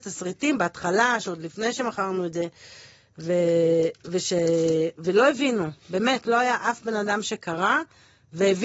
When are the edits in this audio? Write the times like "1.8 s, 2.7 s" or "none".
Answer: 5.8 s